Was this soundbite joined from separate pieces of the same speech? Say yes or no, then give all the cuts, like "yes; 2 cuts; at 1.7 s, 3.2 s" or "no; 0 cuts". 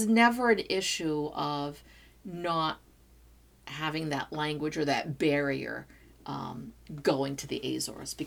no; 0 cuts